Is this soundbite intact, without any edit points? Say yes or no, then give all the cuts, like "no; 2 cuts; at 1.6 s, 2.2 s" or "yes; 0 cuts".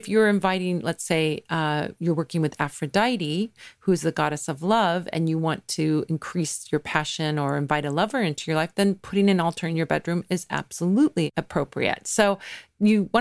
yes; 0 cuts